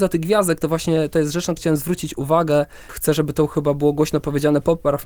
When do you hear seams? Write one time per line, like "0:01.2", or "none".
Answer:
0:01.6
0:02.9